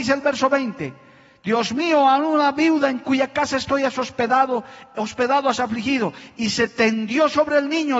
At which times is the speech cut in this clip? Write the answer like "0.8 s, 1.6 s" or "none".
none